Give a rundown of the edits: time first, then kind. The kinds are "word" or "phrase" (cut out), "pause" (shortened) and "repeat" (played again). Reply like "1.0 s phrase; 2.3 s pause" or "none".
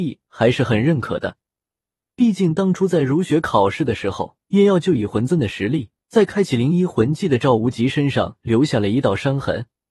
4.4 s pause; 6.0 s pause